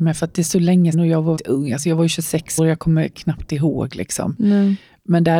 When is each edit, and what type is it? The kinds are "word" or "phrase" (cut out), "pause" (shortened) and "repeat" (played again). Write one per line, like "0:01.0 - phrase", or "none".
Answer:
0:00.9 - word
0:01.4 - word
0:02.6 - word